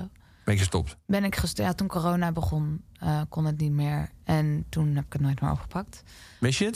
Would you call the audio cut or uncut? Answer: cut